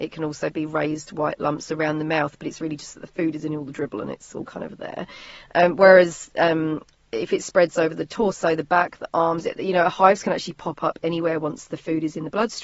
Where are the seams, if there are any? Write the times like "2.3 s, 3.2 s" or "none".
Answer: none